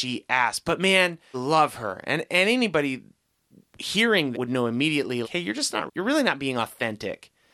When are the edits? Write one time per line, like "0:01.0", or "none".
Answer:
0:01.3
0:02.3
0:04.3
0:05.2
0:05.9